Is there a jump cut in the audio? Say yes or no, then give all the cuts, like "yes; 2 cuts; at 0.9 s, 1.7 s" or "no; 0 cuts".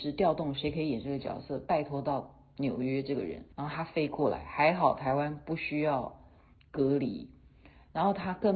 yes; 1 cut; at 3.5 s